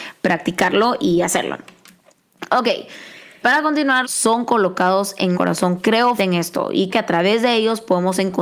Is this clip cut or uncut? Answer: cut